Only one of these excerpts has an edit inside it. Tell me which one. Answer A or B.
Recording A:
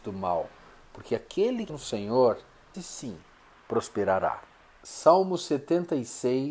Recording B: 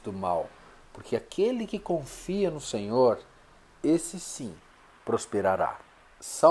A